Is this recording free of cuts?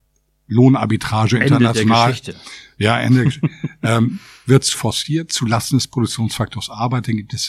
no; 1 cut; at 4.7 s

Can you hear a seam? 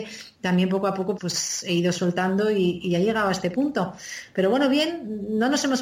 yes; 1 cut; at 1.2 s

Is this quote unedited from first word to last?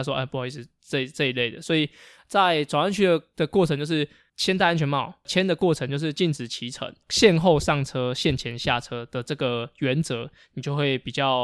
yes; 0 cuts

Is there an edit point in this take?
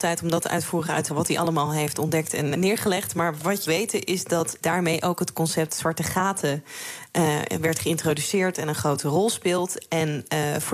yes; 4 cuts; at 1.1 s, 2.5 s, 3.7 s, 4.6 s

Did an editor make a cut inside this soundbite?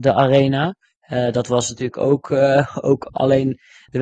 no; 0 cuts

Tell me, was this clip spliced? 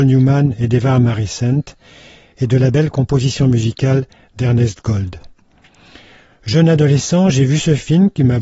no; 0 cuts

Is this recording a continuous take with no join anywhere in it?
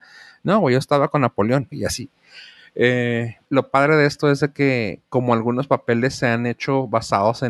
no; 2 cuts; at 1.7 s, 3.4 s

